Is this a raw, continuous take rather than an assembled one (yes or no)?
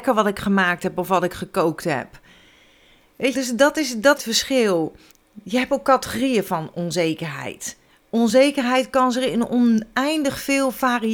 no